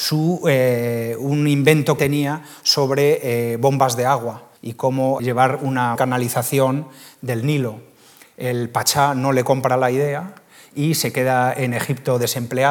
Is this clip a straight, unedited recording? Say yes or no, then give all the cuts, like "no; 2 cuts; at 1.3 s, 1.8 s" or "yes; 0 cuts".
no; 4 cuts; at 2.0 s, 4.6 s, 5.2 s, 6.0 s